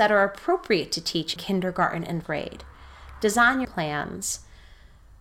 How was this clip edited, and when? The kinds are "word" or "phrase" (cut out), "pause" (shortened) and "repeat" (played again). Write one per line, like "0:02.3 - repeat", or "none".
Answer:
0:01.4 - word
0:02.2 - word
0:03.6 - word